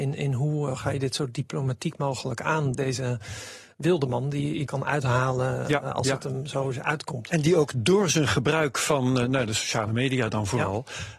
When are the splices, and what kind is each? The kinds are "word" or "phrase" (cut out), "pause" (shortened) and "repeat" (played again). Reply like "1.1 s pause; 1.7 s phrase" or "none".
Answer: 2.7 s word; 4.7 s word